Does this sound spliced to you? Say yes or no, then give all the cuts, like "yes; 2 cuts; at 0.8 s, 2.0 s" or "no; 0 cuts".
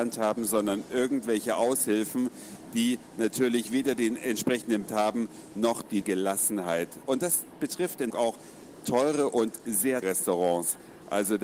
yes; 4 cuts; at 4.9 s, 6.0 s, 8.1 s, 10.0 s